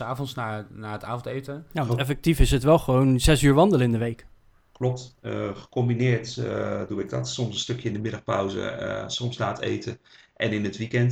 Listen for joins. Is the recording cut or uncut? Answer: uncut